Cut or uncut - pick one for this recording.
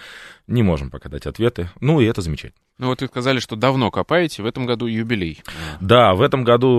uncut